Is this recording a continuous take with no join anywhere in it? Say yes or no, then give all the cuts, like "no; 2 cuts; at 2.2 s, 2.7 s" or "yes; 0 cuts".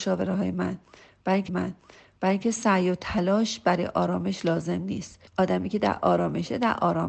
no; 2 cuts; at 1.5 s, 5.3 s